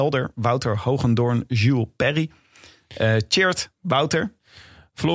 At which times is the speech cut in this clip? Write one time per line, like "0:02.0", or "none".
none